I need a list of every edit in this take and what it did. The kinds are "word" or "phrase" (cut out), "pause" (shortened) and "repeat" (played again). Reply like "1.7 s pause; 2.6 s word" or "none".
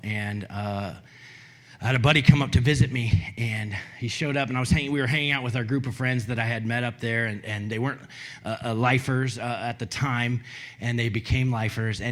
none